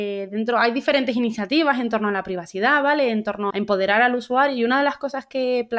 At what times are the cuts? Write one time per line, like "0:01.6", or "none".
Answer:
0:03.5